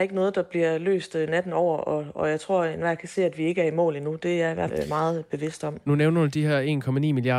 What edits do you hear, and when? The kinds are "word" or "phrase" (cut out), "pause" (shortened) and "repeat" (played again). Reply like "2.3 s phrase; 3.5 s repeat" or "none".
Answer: 4.7 s word